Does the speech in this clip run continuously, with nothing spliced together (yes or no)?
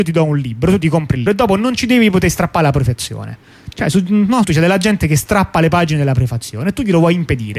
no